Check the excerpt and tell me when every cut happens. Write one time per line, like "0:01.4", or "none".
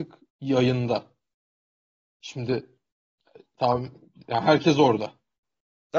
none

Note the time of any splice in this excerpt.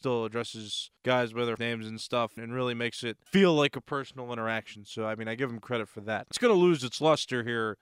0:01.0
0:01.6
0:02.4
0:03.3
0:06.3

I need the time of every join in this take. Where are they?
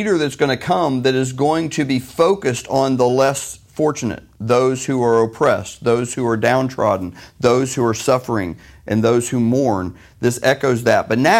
none

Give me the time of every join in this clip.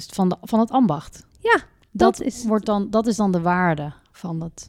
none

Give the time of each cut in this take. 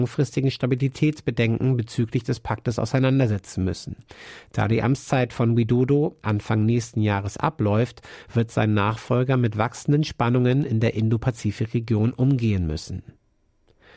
none

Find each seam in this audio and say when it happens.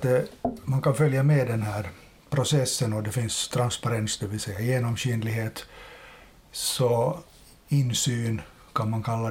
none

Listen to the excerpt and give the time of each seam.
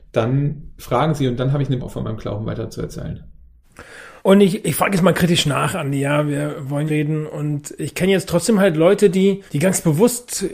0:01.8
0:04.2
0:06.9
0:09.5

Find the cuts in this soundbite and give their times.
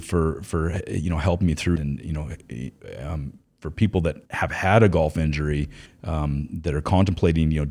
0:01.8
0:04.2
0:05.9

